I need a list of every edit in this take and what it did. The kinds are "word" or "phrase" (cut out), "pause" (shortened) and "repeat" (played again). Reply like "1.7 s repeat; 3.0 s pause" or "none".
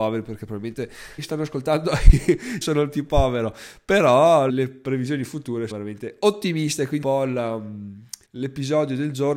1.2 s phrase; 2.6 s word; 4.5 s word; 5.7 s word; 7.0 s phrase; 8.2 s pause